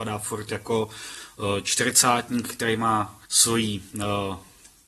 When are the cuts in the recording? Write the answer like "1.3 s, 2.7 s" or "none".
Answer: 3.2 s